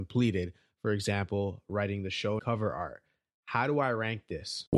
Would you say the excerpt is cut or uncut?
cut